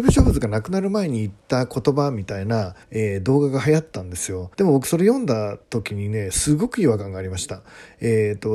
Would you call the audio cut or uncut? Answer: cut